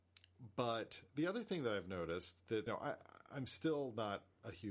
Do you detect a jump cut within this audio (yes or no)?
yes